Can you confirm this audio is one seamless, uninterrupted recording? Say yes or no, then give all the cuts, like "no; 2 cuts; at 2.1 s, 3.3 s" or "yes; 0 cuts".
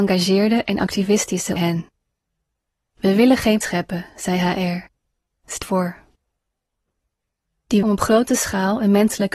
no; 4 cuts; at 1.6 s, 3.6 s, 5.6 s, 7.8 s